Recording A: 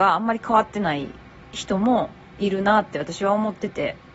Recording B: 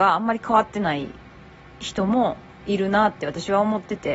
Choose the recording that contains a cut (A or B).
A